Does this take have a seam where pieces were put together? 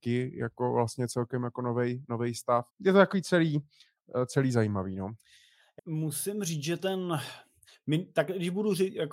yes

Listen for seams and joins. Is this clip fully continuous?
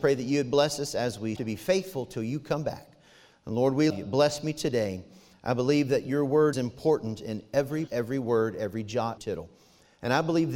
no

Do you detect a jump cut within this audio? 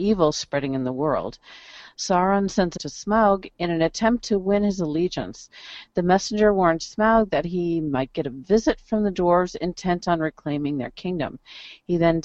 yes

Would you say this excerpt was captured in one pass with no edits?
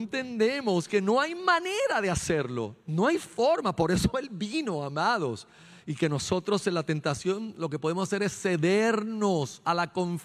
yes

